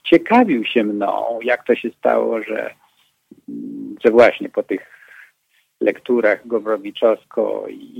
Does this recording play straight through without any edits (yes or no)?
yes